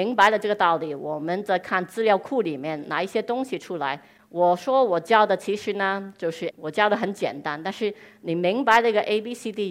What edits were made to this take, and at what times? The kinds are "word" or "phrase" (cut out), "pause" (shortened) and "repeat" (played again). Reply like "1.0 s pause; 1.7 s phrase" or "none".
6.5 s phrase